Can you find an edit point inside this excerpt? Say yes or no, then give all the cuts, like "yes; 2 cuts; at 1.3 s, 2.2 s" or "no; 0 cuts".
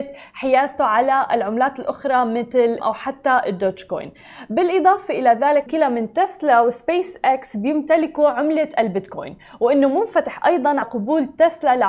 yes; 3 cuts; at 2.8 s, 5.7 s, 10.8 s